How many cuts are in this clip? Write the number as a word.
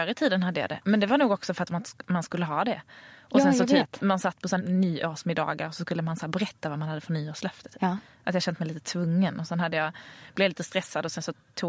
one